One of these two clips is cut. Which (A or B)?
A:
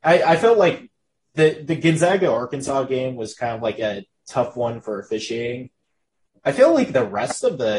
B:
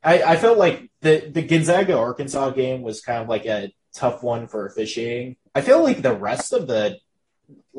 B